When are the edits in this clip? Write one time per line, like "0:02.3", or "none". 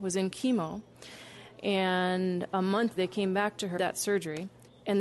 0:01.5
0:03.0
0:03.8